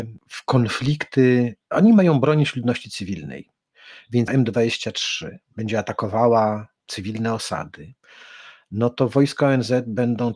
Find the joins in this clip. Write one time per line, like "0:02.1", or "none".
0:04.3
0:06.8